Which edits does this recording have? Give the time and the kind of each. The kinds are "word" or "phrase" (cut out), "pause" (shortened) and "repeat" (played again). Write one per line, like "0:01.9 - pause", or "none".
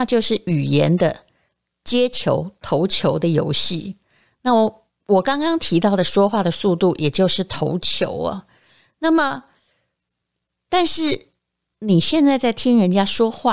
none